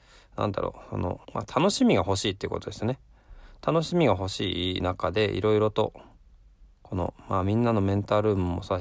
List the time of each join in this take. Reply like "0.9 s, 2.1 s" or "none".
1.2 s